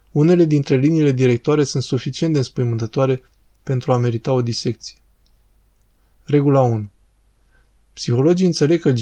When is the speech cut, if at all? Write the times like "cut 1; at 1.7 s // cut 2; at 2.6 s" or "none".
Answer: none

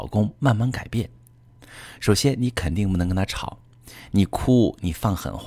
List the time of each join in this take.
none

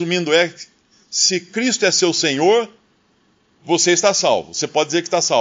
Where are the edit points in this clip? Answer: none

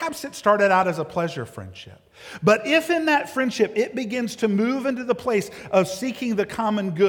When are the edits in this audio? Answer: none

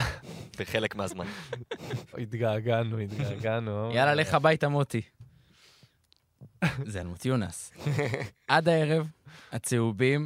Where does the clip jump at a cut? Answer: none

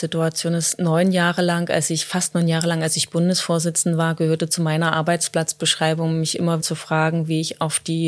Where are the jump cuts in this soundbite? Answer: cut 1; at 6.6 s

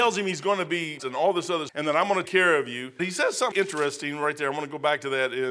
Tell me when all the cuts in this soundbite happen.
cut 1; at 1.0 s // cut 2; at 1.7 s // cut 3; at 2.2 s // cut 4; at 3.0 s // cut 5; at 3.5 s

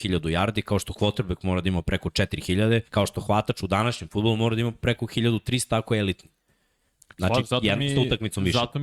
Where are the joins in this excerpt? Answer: cut 1; at 2.9 s

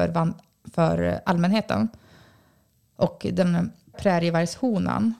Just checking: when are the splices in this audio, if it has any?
cut 1; at 3.9 s

